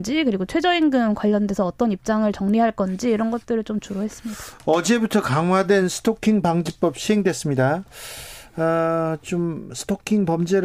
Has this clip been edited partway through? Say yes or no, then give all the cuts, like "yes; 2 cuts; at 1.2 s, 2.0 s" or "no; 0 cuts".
no; 0 cuts